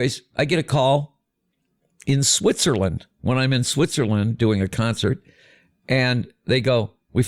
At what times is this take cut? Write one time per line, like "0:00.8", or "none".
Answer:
none